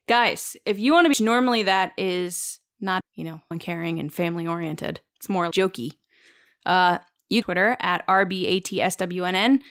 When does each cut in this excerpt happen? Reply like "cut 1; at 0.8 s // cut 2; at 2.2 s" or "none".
cut 1; at 1.1 s // cut 2; at 3.0 s // cut 3; at 3.5 s // cut 4; at 5.5 s // cut 5; at 7.4 s

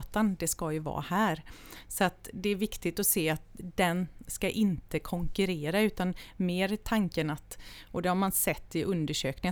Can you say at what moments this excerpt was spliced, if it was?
none

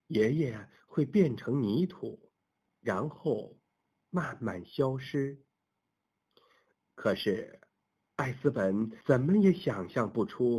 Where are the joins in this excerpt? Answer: cut 1; at 9.0 s

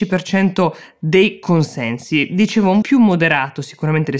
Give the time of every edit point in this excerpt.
cut 1; at 2.8 s

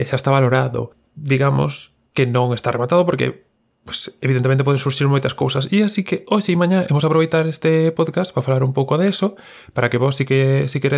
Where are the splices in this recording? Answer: none

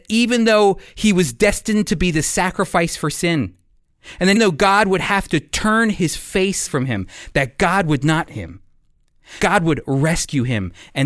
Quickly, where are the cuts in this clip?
cut 1; at 4.4 s // cut 2; at 6.7 s // cut 3; at 8.3 s // cut 4; at 9.4 s

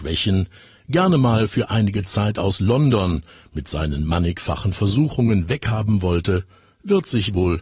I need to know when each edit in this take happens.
none

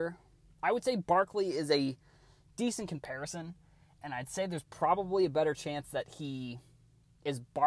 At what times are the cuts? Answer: none

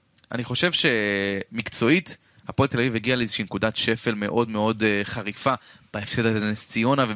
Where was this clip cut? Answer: none

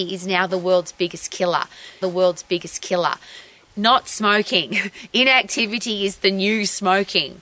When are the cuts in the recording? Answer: cut 1; at 2.0 s

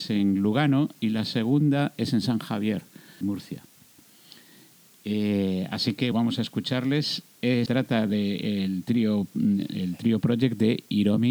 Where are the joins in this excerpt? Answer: cut 1; at 3.2 s // cut 2; at 6.1 s // cut 3; at 7.7 s

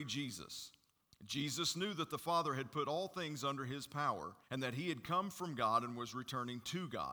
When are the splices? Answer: cut 1; at 4.4 s

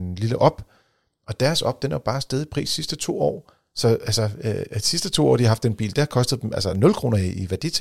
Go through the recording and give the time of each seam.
none

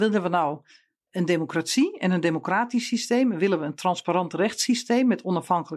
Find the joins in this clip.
none

